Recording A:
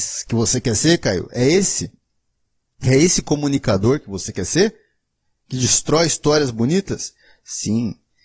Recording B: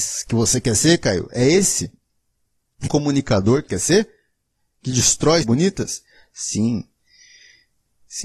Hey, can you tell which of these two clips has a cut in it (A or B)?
B